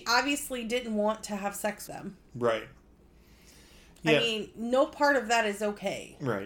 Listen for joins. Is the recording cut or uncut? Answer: cut